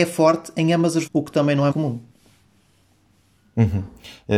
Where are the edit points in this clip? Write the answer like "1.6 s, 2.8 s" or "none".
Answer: 1.1 s, 1.7 s

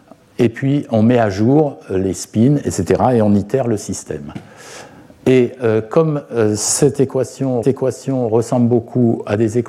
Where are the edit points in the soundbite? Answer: 7.6 s

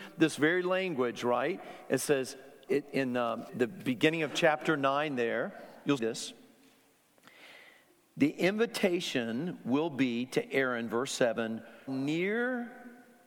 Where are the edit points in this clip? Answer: 2.7 s, 3.5 s, 6.0 s, 11.9 s

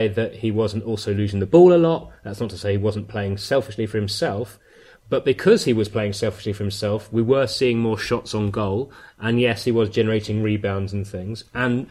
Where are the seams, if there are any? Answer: none

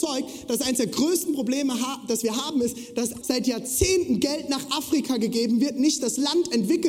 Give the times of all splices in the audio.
3.2 s

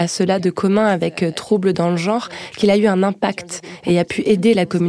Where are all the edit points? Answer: none

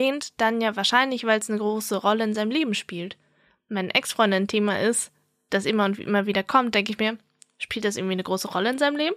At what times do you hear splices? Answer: none

